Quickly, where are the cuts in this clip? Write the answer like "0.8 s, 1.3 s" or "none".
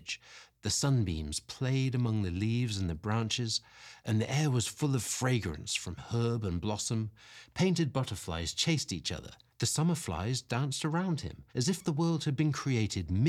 11.5 s